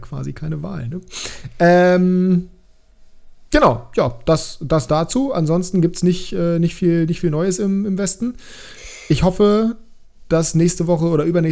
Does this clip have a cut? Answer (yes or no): no